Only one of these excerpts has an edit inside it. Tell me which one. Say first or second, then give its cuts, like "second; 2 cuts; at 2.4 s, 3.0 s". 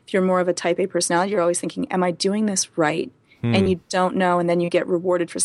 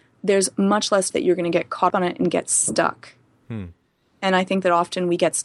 second; 2 cuts; at 1.1 s, 1.9 s